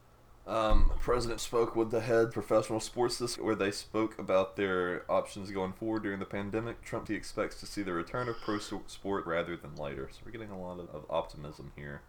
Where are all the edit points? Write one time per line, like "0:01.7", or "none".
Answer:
0:01.4
0:02.3
0:03.4
0:07.1
0:09.3
0:10.9